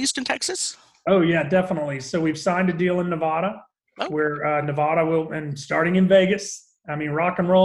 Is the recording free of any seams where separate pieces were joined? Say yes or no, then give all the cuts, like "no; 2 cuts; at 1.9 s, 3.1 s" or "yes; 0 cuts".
yes; 0 cuts